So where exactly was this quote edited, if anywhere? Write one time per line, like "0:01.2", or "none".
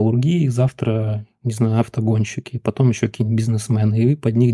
none